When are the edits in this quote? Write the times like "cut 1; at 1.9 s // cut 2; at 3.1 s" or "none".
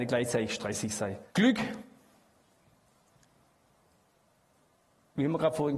cut 1; at 1.3 s